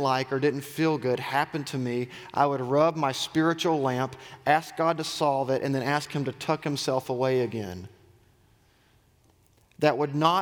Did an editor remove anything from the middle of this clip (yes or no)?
no